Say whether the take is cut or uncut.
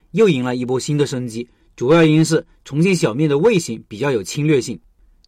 uncut